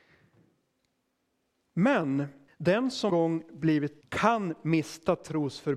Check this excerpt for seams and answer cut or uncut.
cut